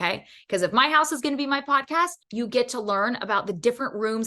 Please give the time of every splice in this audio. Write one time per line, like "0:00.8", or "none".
0:02.2